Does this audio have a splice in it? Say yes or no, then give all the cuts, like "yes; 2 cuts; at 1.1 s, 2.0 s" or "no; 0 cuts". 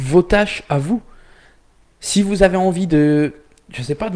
no; 0 cuts